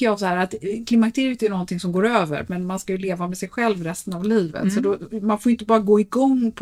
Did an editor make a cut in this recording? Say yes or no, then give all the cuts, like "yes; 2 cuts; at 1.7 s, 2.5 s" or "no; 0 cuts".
no; 0 cuts